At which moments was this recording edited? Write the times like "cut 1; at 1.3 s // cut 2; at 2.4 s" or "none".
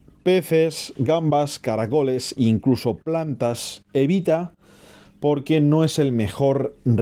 none